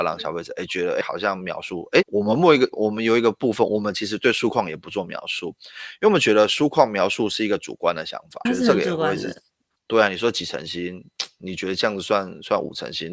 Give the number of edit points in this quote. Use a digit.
4